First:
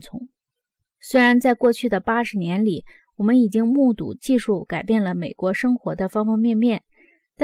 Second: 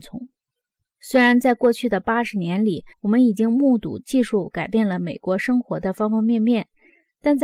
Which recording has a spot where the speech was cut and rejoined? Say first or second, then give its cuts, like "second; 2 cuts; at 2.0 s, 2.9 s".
second; 1 cut; at 2.9 s